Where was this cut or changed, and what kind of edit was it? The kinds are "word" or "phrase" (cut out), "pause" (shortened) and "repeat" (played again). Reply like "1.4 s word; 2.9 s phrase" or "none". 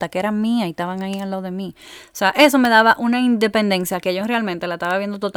none

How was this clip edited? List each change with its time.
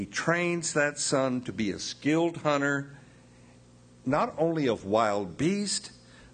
none

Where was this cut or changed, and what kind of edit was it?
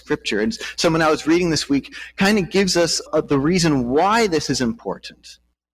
3.1 s word

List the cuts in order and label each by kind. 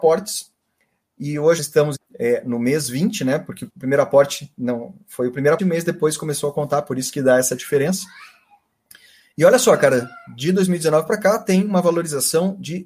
1.6 s word; 1.9 s word; 3.7 s word; 5.6 s word

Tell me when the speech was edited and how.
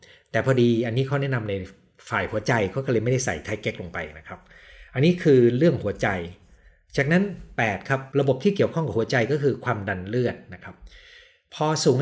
8.1 s pause

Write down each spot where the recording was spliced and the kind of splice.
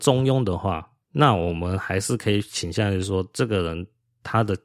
1.0 s pause

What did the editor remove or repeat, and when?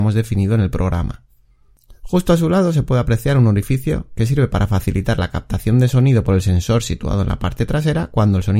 none

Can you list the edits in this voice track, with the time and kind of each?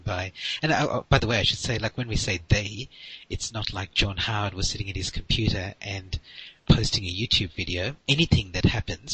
1.0 s pause; 6.6 s pause; 8.0 s pause

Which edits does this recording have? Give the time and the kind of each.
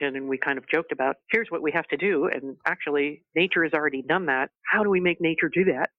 4.6 s pause

